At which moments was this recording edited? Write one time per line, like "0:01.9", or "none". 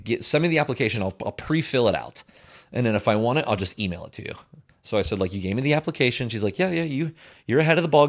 none